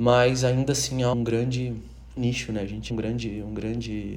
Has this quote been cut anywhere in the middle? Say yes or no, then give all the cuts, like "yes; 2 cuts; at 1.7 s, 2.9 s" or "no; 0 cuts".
yes; 3 cuts; at 1.1 s, 2.2 s, 2.9 s